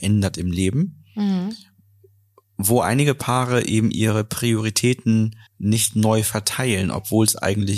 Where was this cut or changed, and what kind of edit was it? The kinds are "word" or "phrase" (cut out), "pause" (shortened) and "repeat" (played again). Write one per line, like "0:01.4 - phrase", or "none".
0:05.5 - pause

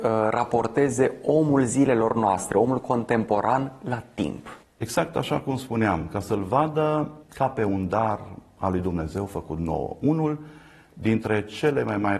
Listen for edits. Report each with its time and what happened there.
0:07.2 - pause

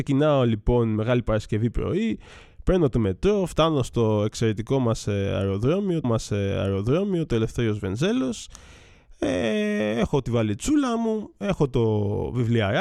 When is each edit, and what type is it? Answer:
0:01.7 - word
0:06.0 - repeat

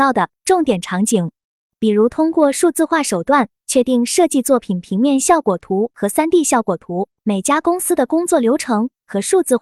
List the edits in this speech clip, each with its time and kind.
0:07.1 - pause

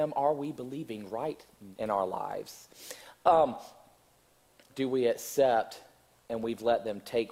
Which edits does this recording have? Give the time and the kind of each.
0:01.7 - word
0:04.7 - phrase

